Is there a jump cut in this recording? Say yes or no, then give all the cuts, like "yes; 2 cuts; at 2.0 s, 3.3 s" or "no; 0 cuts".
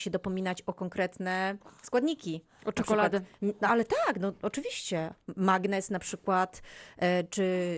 no; 0 cuts